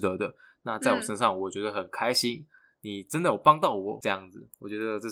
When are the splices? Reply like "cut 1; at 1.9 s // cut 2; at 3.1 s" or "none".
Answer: none